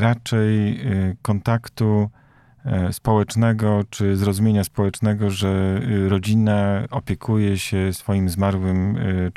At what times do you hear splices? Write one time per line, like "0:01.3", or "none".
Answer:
none